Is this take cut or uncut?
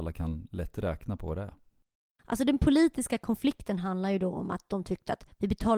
uncut